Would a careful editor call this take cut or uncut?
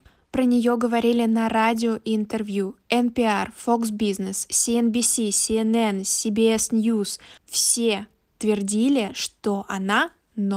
cut